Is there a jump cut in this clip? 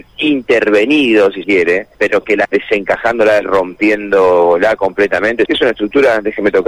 yes; 5 cuts; at 1.4 s, 1.9 s, 2.4 s, 3.4 s, 5.5 s

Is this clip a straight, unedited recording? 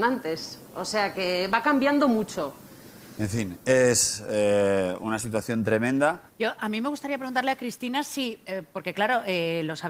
no; 1 cut; at 6.3 s

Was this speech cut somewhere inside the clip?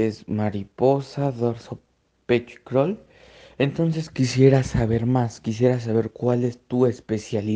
no; 0 cuts

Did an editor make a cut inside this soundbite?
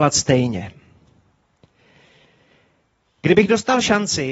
no; 0 cuts

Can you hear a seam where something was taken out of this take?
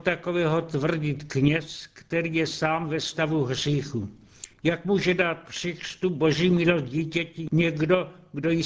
yes; 1 cut; at 4.5 s

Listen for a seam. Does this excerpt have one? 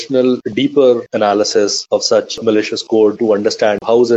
no; 0 cuts

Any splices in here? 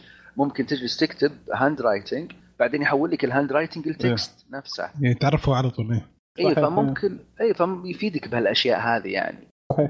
no; 0 cuts

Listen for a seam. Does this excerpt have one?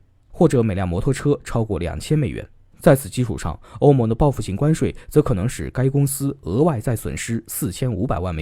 no; 0 cuts

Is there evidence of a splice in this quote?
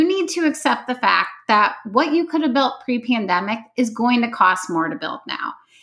no; 0 cuts

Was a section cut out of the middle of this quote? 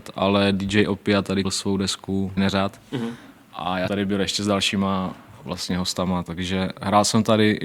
yes; 3 cuts; at 1.4 s, 2.4 s, 3.9 s

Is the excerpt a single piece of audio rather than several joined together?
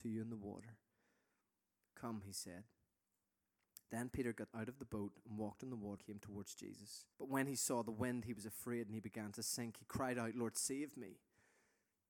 no; 3 cuts; at 4.5 s, 6.0 s, 7.1 s

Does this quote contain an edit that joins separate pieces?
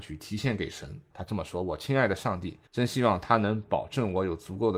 yes; 2 cuts; at 1.1 s, 2.7 s

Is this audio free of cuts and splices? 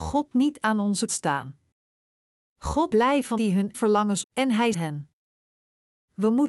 no; 6 cuts; at 1.1 s, 2.9 s, 3.4 s, 3.7 s, 4.2 s, 4.7 s

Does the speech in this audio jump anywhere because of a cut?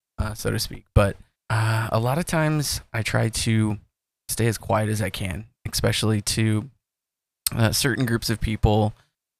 yes; 2 cuts; at 1.4 s, 4.1 s

